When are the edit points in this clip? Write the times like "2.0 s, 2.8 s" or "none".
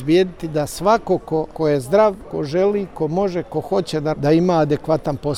4.1 s